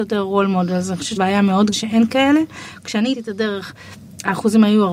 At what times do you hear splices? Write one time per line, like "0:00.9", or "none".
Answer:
0:01.2
0:01.7
0:03.1